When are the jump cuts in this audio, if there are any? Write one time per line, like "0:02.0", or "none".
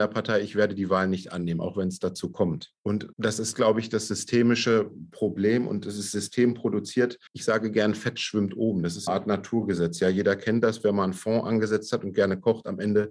0:02.8
0:07.3
0:09.1